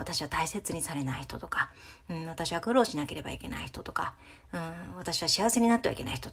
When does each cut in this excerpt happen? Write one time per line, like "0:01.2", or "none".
none